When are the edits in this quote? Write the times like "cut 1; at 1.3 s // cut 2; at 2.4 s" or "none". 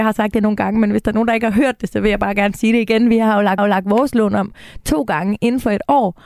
cut 1; at 3.6 s